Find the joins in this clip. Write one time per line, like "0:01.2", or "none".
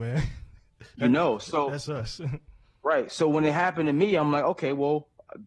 none